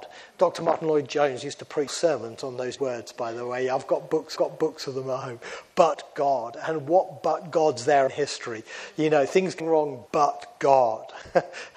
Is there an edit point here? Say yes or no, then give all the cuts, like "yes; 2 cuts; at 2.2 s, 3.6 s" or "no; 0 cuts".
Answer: yes; 6 cuts; at 1.9 s, 2.8 s, 4.4 s, 8.1 s, 9.6 s, 10.1 s